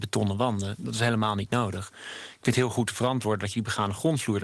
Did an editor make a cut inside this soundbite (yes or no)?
no